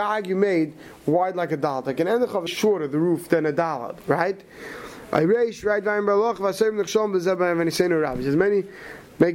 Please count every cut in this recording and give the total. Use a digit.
1